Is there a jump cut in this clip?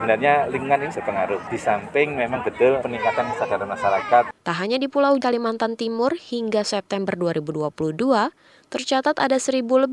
yes; 3 cuts; at 0.9 s, 2.8 s, 5.2 s

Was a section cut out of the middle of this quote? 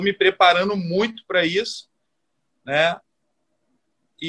no; 0 cuts

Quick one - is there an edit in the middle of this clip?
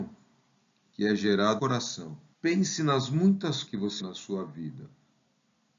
yes; 4 cuts; at 1.6 s, 2.3 s, 3.7 s, 4.0 s

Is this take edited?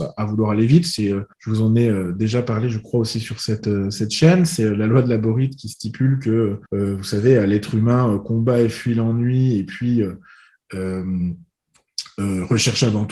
yes; 2 cuts; at 1.3 s, 6.7 s

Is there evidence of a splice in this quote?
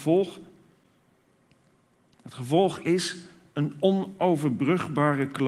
no; 0 cuts

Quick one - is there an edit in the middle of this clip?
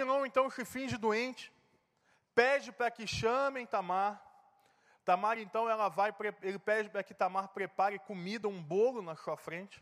no; 0 cuts

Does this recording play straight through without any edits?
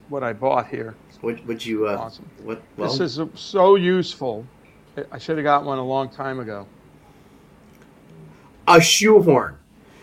yes; 0 cuts

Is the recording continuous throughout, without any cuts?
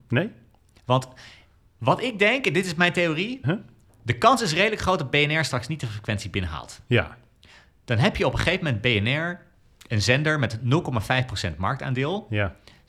no; 1 cut; at 3.4 s

